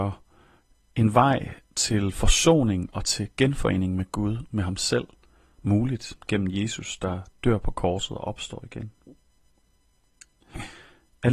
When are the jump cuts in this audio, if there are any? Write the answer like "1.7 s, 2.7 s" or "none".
1.6 s, 6.2 s